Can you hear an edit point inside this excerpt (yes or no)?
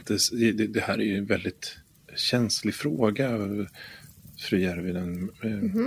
yes